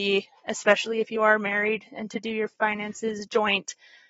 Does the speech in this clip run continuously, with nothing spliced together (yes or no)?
yes